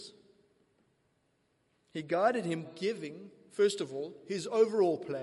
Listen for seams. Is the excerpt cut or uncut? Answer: cut